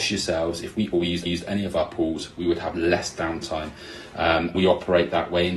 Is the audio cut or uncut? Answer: cut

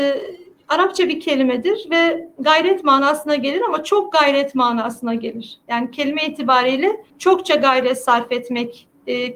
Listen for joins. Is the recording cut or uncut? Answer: cut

